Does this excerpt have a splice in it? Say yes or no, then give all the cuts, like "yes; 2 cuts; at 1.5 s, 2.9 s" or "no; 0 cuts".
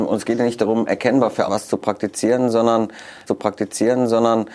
yes; 2 cuts; at 1.5 s, 3.3 s